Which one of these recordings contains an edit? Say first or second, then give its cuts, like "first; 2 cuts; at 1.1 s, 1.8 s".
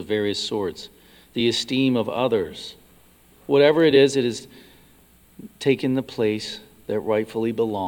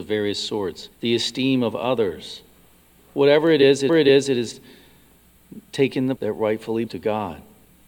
second; 4 cuts; at 0.9 s, 3.9 s, 6.2 s, 6.9 s